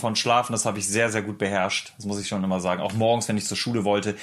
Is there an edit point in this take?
no; 0 cuts

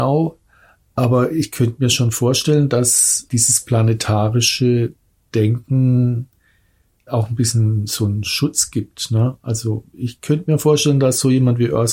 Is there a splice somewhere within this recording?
yes; 2 cuts; at 3.3 s, 7.1 s

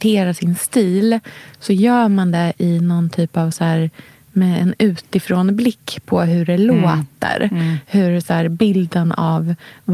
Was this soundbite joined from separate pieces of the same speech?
no; 0 cuts

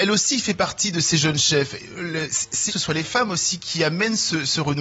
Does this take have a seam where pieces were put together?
yes; 1 cut; at 2.7 s

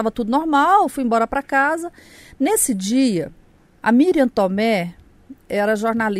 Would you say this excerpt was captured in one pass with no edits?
yes; 0 cuts

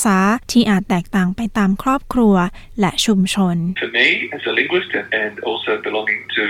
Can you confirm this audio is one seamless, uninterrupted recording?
yes; 0 cuts

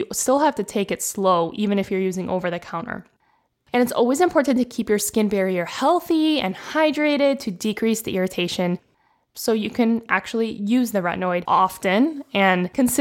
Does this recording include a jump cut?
no; 0 cuts

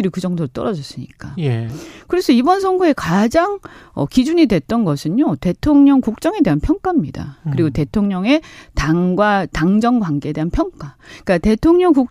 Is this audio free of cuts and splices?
yes; 0 cuts

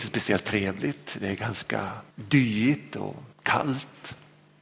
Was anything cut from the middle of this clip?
yes; 2 cuts; at 2.1 s, 3.3 s

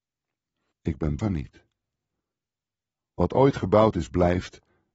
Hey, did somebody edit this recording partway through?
yes; 1 cut; at 1.2 s

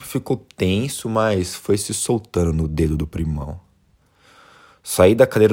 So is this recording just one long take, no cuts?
yes; 0 cuts

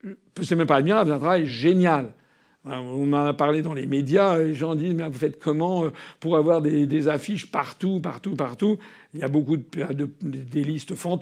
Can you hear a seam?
no; 0 cuts

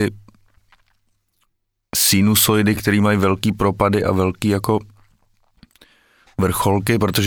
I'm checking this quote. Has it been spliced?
no; 0 cuts

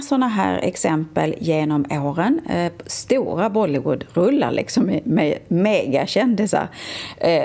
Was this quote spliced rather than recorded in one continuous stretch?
no; 0 cuts

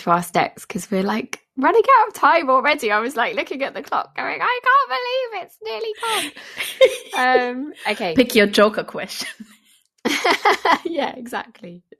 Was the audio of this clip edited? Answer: no; 0 cuts

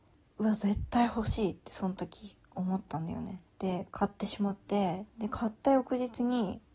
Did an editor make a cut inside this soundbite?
yes; 2 cuts; at 3.5 s, 5.1 s

